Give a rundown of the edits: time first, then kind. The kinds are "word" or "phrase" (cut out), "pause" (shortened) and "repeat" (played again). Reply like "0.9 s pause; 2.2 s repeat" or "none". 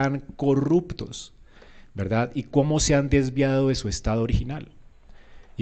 none